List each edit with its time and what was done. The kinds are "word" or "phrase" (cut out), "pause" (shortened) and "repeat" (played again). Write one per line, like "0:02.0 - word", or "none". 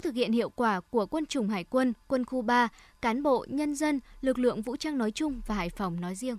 none